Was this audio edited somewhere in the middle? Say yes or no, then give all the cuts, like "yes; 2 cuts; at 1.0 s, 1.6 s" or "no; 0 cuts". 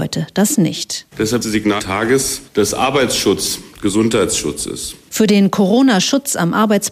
yes; 3 cuts; at 1.4 s, 1.8 s, 2.5 s